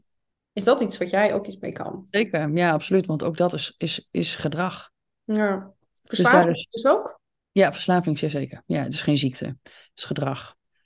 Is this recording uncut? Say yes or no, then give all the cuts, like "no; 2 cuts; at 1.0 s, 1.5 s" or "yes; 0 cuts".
yes; 0 cuts